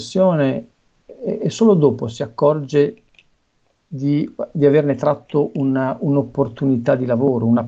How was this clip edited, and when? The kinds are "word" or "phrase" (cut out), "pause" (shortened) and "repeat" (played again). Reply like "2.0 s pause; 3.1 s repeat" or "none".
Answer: none